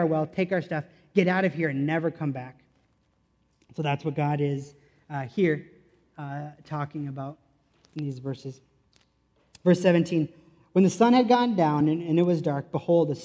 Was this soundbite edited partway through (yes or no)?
no